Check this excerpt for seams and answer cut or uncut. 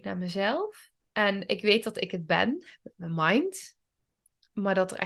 cut